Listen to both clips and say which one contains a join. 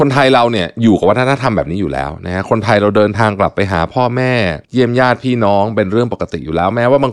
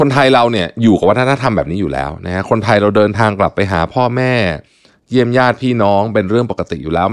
first; 1 cut; at 4.6 s

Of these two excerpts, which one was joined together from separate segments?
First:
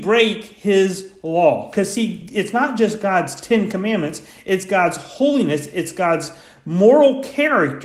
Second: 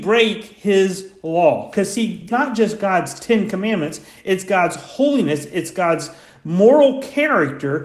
second; 1 cut; at 2.3 s

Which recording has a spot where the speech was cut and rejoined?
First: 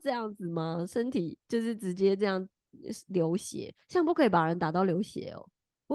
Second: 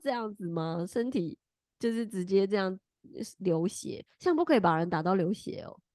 first; 1 cut; at 1.4 s

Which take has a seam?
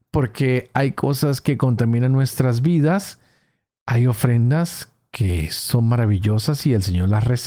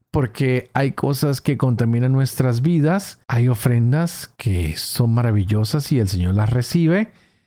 second; 2 cuts; at 3.2 s, 4.3 s

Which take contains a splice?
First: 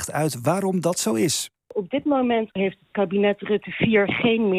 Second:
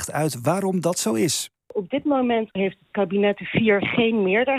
second; 1 cut; at 3.4 s

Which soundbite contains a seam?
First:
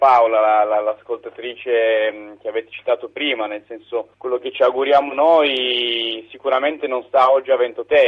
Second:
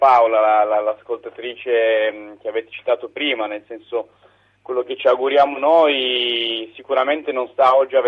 first; 1 cut; at 4.1 s

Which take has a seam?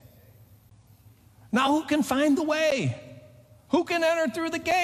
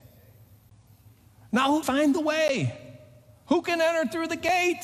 second; 1 cut; at 1.8 s

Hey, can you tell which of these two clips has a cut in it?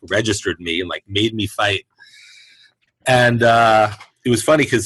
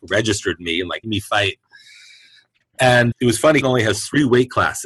second; 3 cuts; at 1.0 s, 3.1 s, 3.6 s

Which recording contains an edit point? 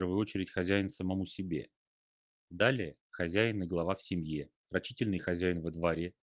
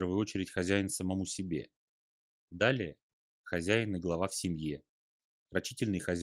first; 2 cuts; at 3.0 s, 4.6 s

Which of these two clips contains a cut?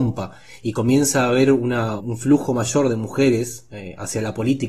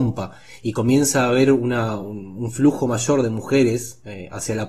first; 1 cut; at 2.0 s

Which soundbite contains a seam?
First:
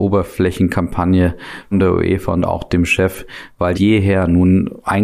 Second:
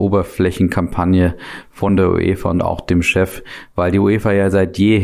first; 2 cuts; at 1.7 s, 3.7 s

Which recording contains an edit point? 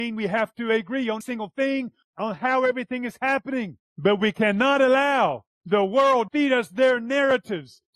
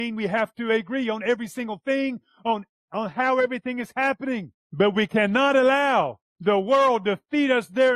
first; 3 cuts; at 1.2 s, 2.0 s, 6.3 s

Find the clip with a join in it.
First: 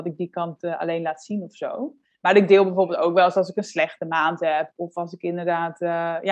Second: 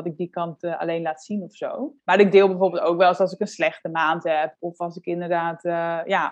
second; 1 cut; at 2.0 s

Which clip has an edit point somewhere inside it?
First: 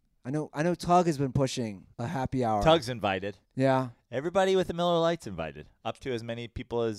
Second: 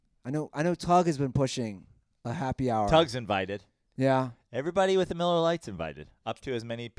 first; 2 cuts; at 1.9 s, 3.4 s

